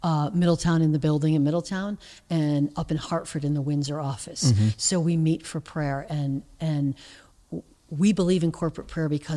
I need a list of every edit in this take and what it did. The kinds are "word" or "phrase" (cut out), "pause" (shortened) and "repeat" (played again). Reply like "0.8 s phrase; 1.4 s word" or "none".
none